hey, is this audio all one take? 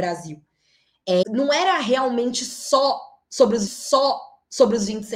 no; 2 cuts; at 1.2 s, 3.7 s

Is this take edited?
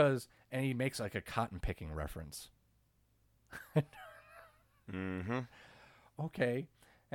no; 0 cuts

